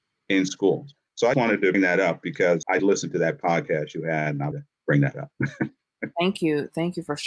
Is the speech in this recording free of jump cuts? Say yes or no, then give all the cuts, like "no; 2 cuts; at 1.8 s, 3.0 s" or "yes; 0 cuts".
no; 5 cuts; at 1.3 s, 1.7 s, 2.8 s, 4.5 s, 6.1 s